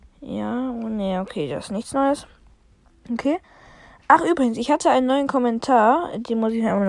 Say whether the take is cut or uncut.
uncut